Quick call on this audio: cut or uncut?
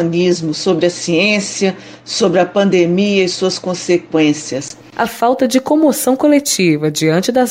uncut